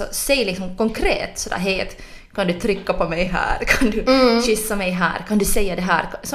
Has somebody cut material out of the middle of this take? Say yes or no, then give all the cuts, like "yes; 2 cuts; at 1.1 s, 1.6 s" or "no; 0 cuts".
no; 0 cuts